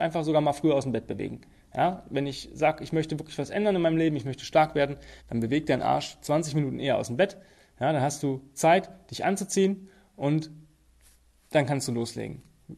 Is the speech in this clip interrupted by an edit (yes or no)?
yes